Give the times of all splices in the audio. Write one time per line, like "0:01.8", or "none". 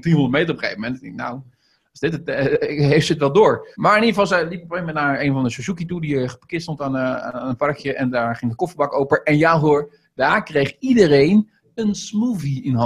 0:03.7